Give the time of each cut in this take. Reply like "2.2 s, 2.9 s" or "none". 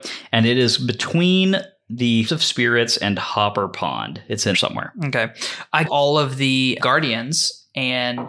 2.3 s, 4.5 s, 5.9 s, 6.8 s